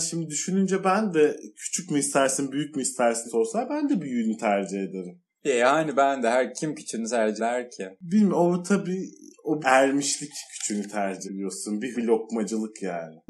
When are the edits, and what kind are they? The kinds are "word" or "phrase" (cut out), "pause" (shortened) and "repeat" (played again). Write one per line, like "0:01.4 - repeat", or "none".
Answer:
0:03.2 - word
0:06.5 - word
0:07.4 - word
0:09.6 - word
0:11.2 - word
0:11.9 - word